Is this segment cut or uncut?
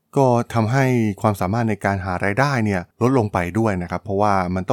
cut